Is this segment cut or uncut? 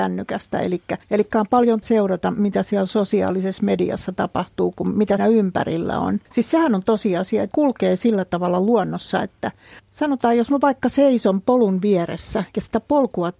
cut